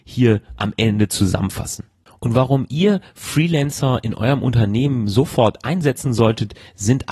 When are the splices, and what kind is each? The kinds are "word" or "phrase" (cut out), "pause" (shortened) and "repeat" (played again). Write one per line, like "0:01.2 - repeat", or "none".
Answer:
none